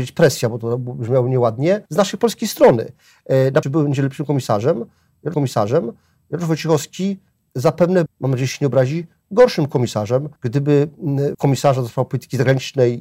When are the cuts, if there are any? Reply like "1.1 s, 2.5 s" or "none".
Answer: 1.9 s, 3.6 s, 5.3 s, 8.1 s, 10.4 s, 11.3 s

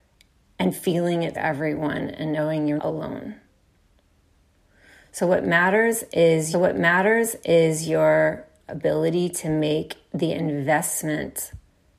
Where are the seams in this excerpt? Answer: 1.3 s, 2.8 s, 6.5 s

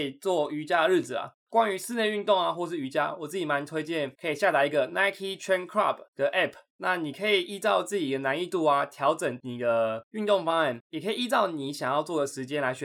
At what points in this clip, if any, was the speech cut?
none

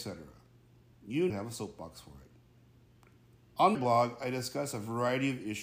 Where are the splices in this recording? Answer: 1.3 s, 3.7 s

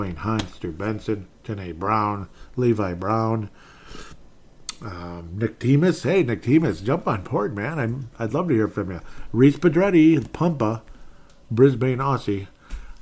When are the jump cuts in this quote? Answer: none

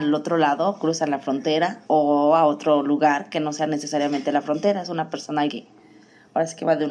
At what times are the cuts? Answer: 1.8 s, 5.5 s

